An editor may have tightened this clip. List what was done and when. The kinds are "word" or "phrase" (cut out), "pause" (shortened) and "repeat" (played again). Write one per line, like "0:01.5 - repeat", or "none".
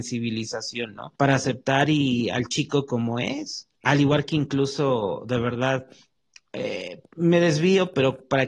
0:01.2 - pause
0:03.8 - pause
0:07.1 - pause